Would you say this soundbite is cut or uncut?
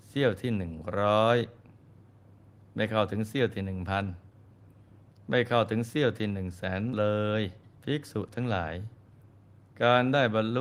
cut